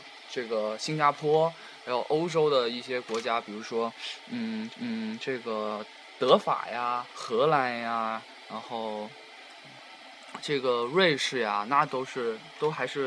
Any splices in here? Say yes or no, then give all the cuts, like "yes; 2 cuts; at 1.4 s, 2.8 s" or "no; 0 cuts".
yes; 2 cuts; at 4.7 s, 7.1 s